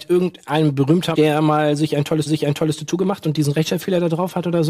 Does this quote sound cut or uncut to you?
cut